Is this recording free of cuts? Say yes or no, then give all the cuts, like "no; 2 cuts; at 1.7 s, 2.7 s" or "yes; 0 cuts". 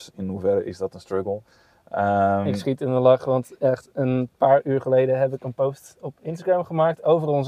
yes; 0 cuts